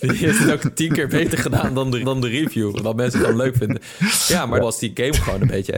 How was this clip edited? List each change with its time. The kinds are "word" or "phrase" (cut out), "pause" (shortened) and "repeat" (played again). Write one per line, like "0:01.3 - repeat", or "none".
0:02.0 - repeat
0:03.1 - word
0:04.6 - phrase